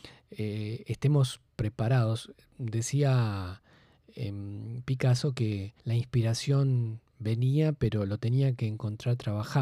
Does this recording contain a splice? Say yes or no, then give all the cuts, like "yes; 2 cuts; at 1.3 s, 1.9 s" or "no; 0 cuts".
yes; 1 cut; at 5.8 s